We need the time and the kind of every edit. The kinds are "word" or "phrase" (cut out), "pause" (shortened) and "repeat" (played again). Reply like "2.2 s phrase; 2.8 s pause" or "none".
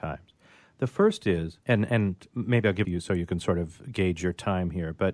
1.6 s pause; 2.8 s phrase